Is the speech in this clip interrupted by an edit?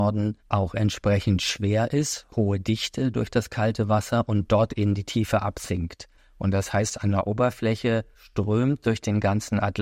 no; 0 cuts

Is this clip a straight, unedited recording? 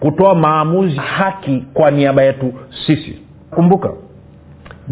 no; 2 cuts; at 1.0 s, 3.5 s

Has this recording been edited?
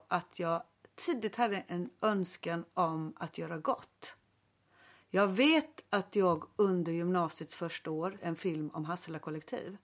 yes; 1 cut; at 8.2 s

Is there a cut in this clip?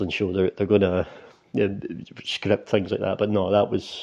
no; 0 cuts

